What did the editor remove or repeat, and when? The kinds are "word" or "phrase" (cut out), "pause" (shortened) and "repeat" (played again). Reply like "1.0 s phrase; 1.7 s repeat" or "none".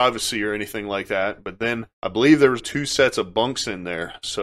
1.9 s pause; 2.6 s word